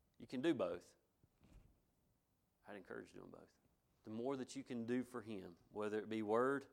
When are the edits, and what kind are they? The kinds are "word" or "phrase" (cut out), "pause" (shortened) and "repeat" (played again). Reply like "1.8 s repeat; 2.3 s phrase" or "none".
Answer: 3.8 s pause